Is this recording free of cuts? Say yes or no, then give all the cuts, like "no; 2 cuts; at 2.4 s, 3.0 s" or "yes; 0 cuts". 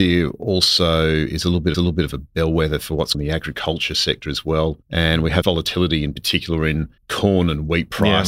no; 5 cuts; at 1.7 s, 3.1 s, 4.8 s, 5.4 s, 7.0 s